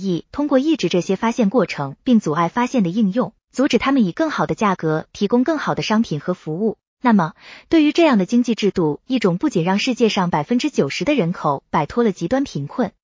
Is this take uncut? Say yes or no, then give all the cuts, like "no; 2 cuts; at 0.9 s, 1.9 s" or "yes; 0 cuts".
no; 2 cuts; at 2.0 s, 6.9 s